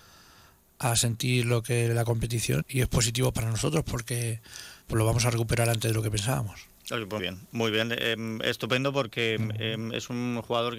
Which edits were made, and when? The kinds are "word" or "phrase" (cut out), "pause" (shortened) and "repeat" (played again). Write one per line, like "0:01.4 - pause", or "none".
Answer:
0:02.6 - word
0:04.8 - pause
0:07.2 - word